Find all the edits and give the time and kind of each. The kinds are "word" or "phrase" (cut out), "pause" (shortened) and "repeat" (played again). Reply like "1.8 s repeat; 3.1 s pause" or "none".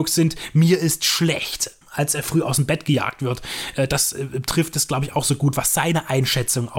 1.8 s pause